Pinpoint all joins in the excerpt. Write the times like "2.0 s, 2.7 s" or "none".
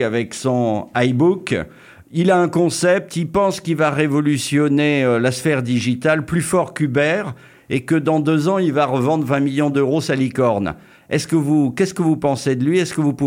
none